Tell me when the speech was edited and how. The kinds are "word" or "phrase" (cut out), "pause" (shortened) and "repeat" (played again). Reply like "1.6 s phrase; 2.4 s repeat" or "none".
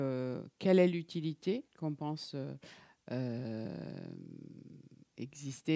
1.7 s pause